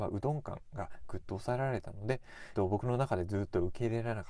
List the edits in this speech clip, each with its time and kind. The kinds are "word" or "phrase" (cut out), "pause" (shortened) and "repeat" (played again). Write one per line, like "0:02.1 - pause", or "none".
0:02.5 - phrase